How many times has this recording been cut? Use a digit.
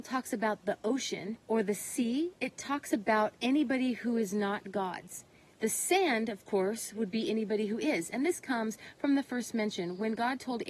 1